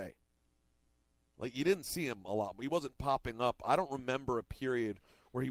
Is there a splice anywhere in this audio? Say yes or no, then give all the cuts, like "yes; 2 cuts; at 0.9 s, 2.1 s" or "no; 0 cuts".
no; 0 cuts